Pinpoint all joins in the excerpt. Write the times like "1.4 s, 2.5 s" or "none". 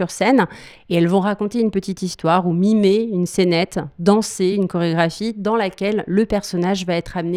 none